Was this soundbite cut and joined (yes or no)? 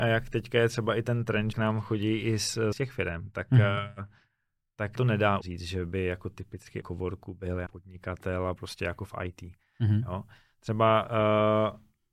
yes